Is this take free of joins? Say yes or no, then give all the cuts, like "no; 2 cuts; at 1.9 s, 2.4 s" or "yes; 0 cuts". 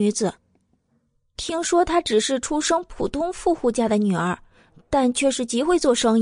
yes; 0 cuts